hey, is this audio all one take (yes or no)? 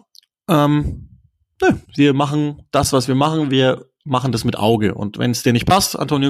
no